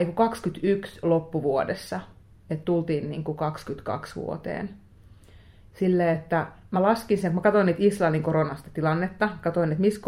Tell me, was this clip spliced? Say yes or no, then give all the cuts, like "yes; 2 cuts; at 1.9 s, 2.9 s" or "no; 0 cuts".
no; 0 cuts